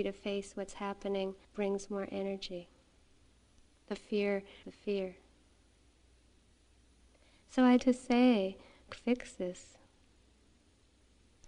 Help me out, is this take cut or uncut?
cut